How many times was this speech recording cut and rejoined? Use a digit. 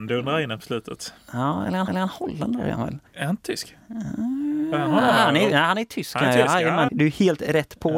3